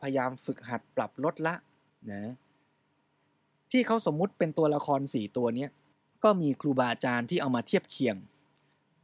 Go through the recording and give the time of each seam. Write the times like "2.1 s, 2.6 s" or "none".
1.9 s, 5.9 s